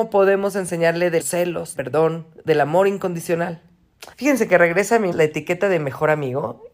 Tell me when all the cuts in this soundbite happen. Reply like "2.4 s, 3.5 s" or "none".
1.2 s, 1.7 s, 4.1 s, 5.1 s